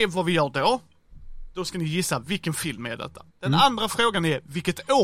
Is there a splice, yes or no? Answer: yes